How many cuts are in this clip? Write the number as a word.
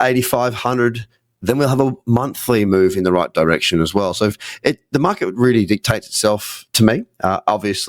zero